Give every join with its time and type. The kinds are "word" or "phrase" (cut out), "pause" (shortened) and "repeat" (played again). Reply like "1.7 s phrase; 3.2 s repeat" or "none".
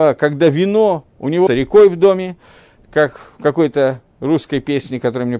1.5 s word